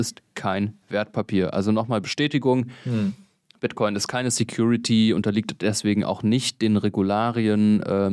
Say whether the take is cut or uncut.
uncut